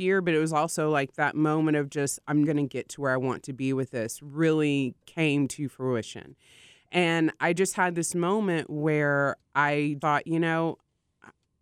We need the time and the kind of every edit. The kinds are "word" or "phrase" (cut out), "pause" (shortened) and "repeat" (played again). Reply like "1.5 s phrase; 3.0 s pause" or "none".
2.4 s word; 10.0 s word